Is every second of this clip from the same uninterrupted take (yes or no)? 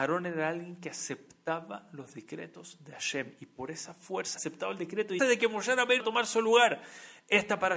no